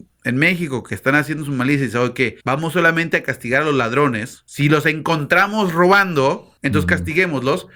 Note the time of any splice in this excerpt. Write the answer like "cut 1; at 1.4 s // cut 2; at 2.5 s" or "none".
cut 1; at 2.4 s // cut 2; at 6.6 s